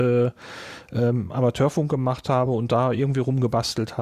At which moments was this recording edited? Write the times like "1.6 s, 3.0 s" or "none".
none